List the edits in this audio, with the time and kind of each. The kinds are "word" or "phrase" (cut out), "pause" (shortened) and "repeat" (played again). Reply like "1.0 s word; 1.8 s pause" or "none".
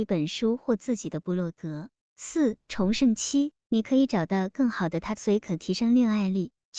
3.6 s pause; 5.1 s phrase